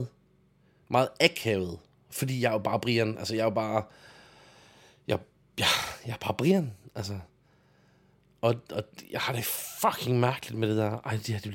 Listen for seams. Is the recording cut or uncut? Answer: uncut